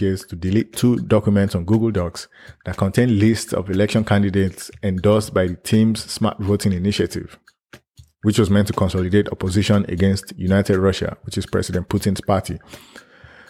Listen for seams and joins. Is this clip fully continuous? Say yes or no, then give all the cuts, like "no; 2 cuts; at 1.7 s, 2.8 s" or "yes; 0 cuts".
yes; 0 cuts